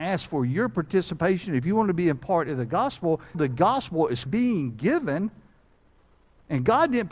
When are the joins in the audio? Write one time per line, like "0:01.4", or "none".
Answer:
0:03.3
0:04.3